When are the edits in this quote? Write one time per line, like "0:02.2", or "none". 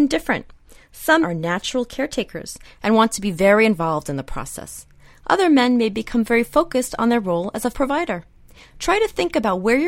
0:01.2
0:07.7